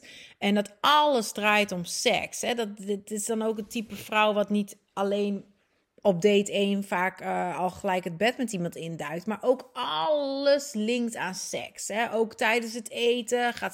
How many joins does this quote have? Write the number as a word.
zero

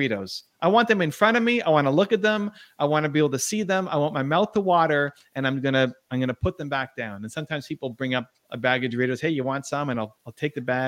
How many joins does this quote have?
zero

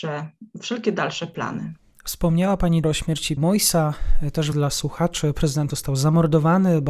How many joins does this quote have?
four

